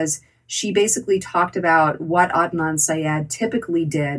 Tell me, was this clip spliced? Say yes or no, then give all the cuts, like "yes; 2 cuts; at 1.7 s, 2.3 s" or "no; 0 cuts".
no; 0 cuts